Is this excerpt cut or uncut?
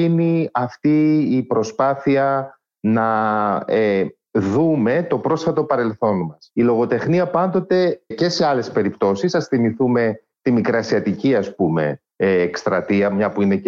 cut